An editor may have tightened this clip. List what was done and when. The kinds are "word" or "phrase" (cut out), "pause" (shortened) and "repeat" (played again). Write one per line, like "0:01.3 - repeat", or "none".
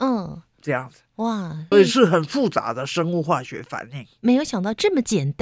0:01.7 - word